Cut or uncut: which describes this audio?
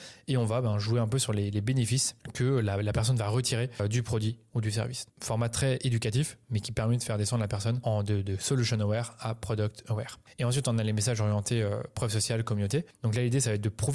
uncut